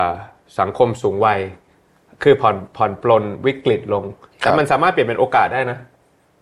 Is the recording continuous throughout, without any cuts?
yes; 0 cuts

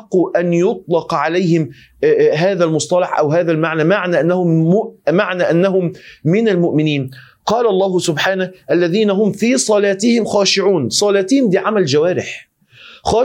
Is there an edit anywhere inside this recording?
no; 0 cuts

